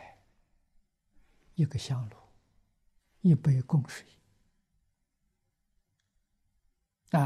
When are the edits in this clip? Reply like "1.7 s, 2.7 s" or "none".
none